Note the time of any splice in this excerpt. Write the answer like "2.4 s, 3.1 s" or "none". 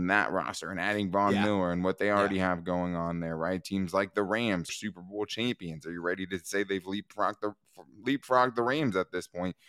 4.7 s